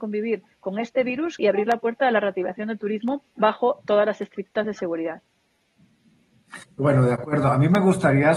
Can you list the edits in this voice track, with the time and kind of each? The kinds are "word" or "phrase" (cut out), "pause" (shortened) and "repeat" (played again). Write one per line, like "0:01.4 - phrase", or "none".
0:01.4 - phrase
0:03.3 - pause
0:04.6 - word
0:06.6 - pause